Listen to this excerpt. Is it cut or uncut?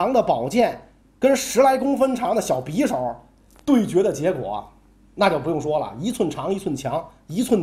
uncut